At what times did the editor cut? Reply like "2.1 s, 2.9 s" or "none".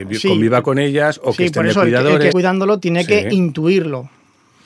2.3 s

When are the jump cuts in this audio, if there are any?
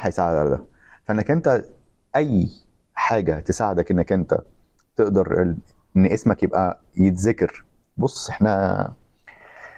none

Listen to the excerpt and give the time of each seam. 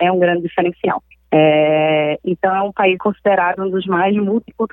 1.1 s, 3.0 s

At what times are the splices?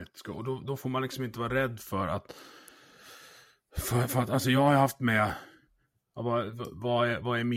none

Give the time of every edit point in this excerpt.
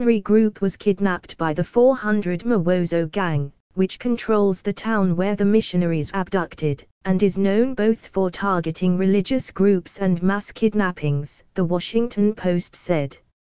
6.1 s, 11.5 s

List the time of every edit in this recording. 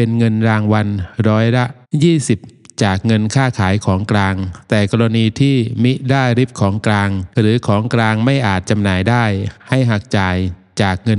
1.8 s, 7.3 s

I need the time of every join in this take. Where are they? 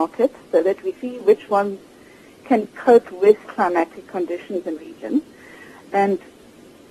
0.9 s, 2.7 s, 3.4 s, 4.8 s

